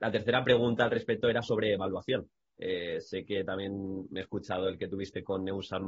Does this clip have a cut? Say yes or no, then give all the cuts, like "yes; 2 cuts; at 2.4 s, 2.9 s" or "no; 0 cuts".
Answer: no; 0 cuts